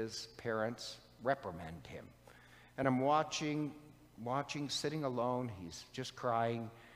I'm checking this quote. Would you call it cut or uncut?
uncut